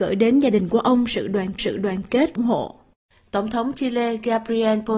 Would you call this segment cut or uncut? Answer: cut